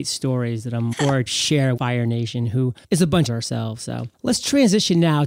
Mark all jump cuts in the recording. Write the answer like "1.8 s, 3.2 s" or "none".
0.9 s, 1.3 s, 1.8 s, 2.8 s, 3.3 s, 4.1 s